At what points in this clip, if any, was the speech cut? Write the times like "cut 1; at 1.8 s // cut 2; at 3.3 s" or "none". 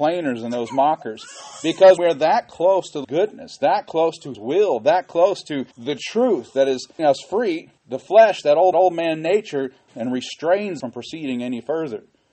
cut 1; at 2.0 s // cut 2; at 3.0 s // cut 3; at 4.3 s // cut 4; at 5.7 s // cut 5; at 7.0 s // cut 6; at 7.8 s // cut 7; at 8.7 s // cut 8; at 9.9 s // cut 9; at 10.8 s